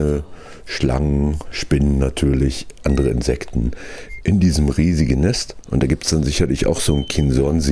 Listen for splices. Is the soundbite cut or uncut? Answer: uncut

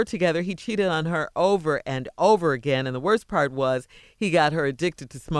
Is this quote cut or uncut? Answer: uncut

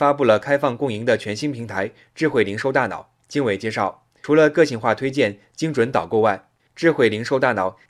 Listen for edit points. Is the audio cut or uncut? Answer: cut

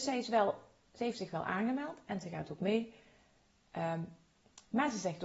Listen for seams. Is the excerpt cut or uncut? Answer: uncut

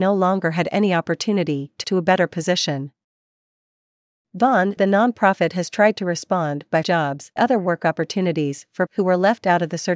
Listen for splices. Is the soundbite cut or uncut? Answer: cut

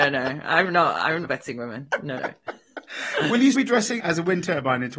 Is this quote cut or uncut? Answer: cut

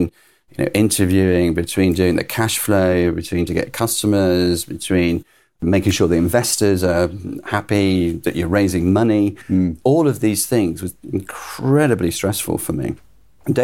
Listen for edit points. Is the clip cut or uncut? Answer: cut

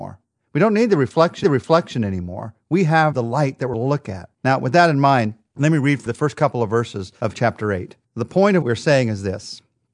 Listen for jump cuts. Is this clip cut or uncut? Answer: cut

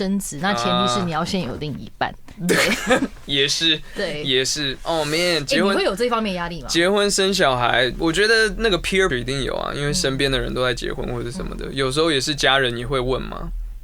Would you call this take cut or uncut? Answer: cut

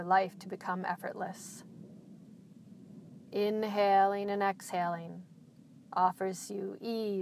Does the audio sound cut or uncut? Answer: cut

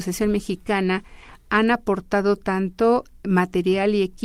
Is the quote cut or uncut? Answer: uncut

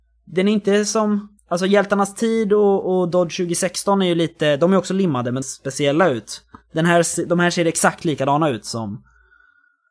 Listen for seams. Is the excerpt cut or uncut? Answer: cut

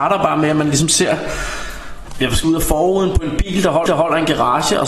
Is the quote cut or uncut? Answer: cut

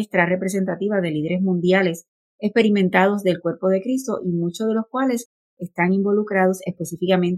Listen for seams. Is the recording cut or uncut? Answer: uncut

